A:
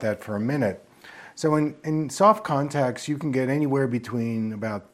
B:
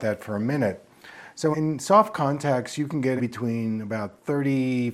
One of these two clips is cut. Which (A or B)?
B